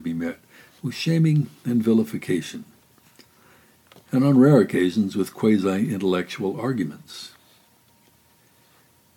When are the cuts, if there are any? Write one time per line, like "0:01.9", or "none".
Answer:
none